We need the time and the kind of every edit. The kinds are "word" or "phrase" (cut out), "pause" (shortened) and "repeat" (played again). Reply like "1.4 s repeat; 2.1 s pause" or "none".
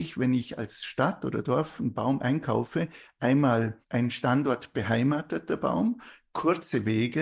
3.8 s pause